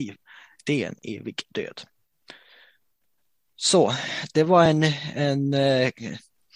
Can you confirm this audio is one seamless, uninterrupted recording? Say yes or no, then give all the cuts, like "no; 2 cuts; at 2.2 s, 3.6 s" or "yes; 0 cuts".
yes; 0 cuts